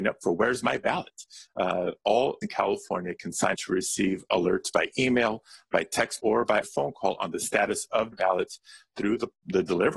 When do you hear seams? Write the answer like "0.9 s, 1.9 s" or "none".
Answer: 2.4 s, 3.5 s, 6.2 s, 6.6 s, 8.1 s